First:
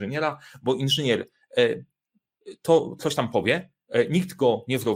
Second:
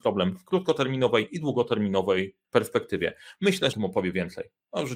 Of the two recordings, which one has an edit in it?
second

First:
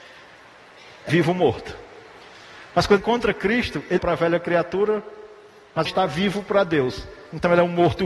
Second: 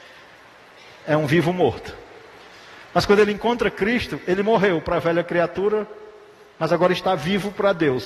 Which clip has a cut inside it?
first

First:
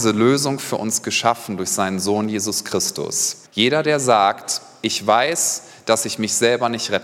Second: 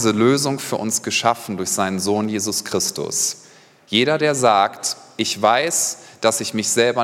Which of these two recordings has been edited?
first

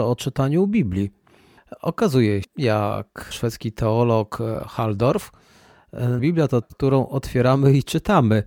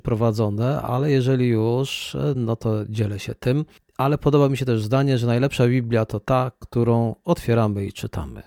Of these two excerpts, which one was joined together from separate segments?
first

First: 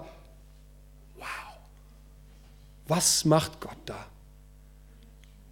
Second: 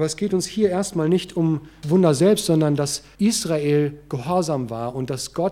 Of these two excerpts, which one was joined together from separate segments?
second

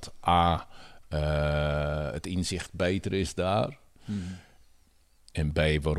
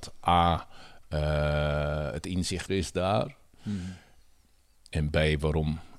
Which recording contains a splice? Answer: second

